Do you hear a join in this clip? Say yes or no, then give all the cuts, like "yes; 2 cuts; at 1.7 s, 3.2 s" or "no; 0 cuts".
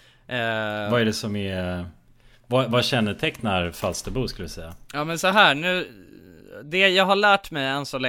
no; 0 cuts